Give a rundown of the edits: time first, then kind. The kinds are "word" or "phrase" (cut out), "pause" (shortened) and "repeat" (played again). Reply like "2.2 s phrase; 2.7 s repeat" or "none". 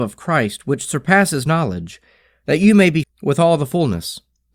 3.0 s word